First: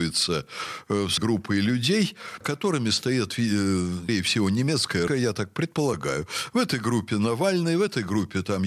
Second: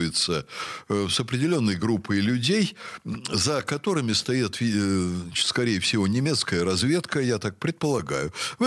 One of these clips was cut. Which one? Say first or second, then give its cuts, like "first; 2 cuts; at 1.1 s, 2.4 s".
first; 4 cuts; at 1.2 s, 2.4 s, 4.1 s, 5.1 s